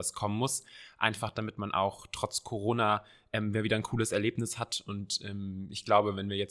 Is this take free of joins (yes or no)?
yes